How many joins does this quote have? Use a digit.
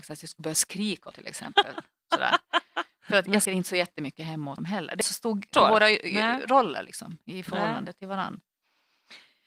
5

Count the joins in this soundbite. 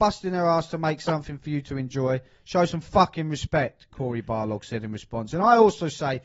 0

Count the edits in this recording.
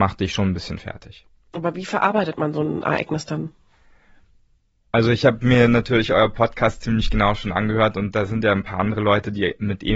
0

